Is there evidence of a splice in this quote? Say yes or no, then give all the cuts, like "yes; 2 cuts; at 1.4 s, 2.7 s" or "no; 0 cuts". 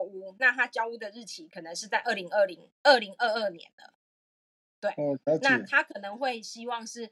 no; 0 cuts